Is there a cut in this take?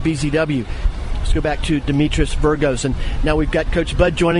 no; 0 cuts

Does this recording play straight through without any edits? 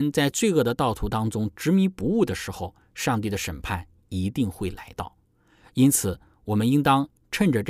yes; 0 cuts

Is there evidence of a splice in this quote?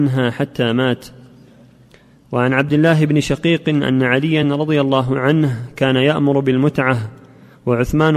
no; 0 cuts

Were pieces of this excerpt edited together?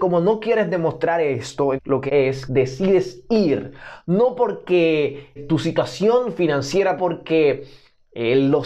yes; 5 cuts; at 1.8 s, 2.1 s, 2.5 s, 5.4 s, 7.0 s

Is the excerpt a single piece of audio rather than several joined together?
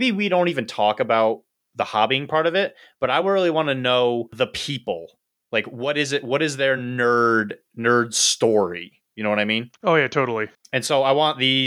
yes; 0 cuts

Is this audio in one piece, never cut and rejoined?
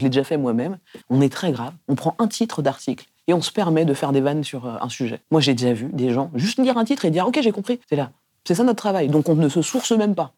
no; 3 cuts; at 1.0 s, 5.2 s, 7.8 s

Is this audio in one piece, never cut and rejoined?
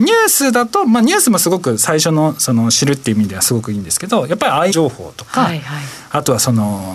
no; 1 cut; at 4.7 s

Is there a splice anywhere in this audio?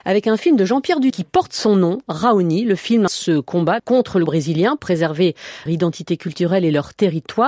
yes; 6 cuts; at 1.1 s, 3.1 s, 3.8 s, 4.3 s, 4.8 s, 5.7 s

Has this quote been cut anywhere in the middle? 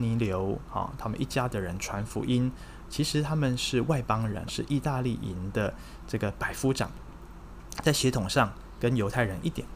yes; 1 cut; at 4.5 s

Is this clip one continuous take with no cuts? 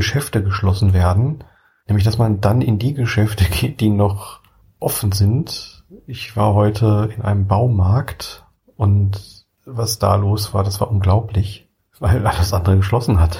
yes; 0 cuts

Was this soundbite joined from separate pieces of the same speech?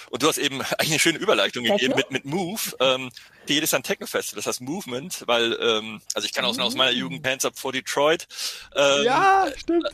yes; 5 cuts; at 1.9 s, 3.5 s, 6.1 s, 6.6 s, 7.2 s

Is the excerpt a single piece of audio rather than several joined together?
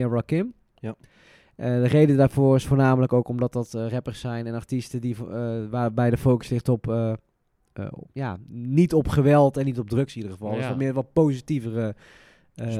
yes; 0 cuts

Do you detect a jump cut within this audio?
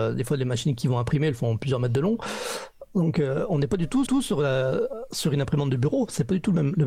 yes; 1 cut; at 4.1 s

